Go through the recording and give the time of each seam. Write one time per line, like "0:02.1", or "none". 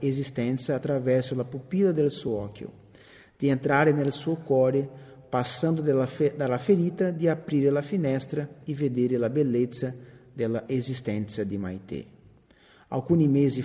none